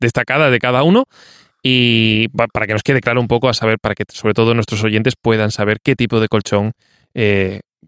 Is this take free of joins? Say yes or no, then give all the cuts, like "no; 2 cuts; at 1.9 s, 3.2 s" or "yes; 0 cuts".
yes; 0 cuts